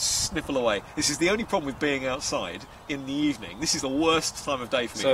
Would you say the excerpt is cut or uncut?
cut